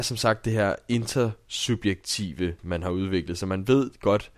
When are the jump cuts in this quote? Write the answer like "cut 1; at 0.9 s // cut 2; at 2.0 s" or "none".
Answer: cut 1; at 2.6 s